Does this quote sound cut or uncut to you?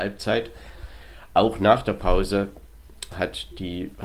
uncut